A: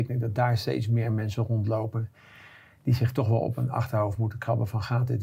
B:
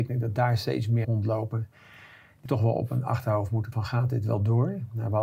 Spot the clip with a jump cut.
B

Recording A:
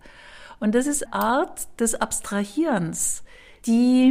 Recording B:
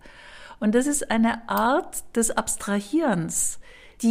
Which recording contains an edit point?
A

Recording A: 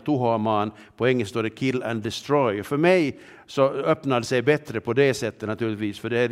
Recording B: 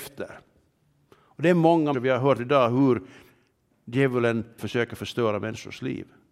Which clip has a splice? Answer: B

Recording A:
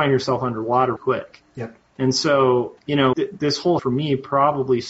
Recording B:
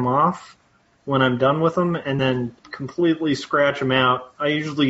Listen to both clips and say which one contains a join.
A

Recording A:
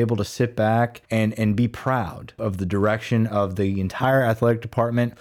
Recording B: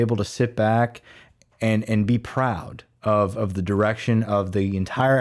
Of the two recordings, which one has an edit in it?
A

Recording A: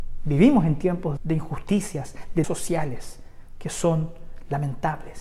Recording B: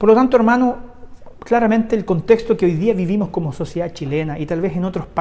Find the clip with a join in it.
A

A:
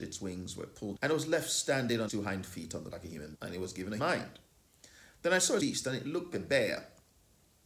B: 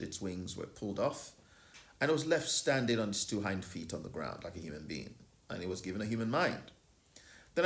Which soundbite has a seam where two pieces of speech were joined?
A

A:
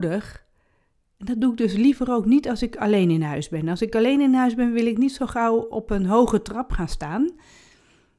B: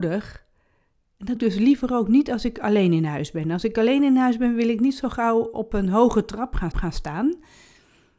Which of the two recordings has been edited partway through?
B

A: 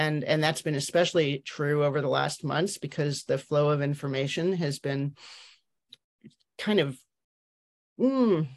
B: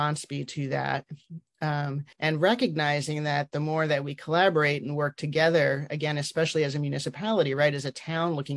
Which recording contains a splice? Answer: B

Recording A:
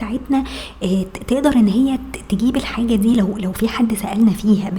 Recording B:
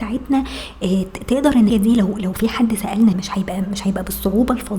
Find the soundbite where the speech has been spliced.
B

